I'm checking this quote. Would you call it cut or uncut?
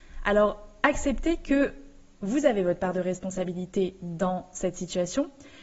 uncut